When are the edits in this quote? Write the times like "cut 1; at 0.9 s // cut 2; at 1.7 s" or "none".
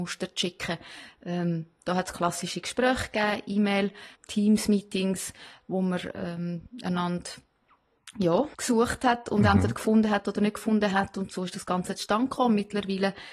cut 1; at 4.1 s // cut 2; at 8.5 s

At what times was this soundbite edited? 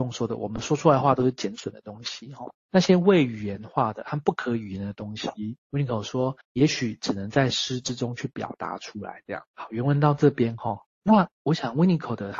cut 1; at 2.6 s // cut 2; at 5.6 s // cut 3; at 6.4 s // cut 4; at 9.5 s // cut 5; at 10.9 s

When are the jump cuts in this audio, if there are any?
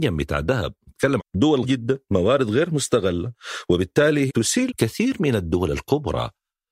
cut 1; at 1.2 s // cut 2; at 1.6 s // cut 3; at 4.3 s // cut 4; at 4.7 s

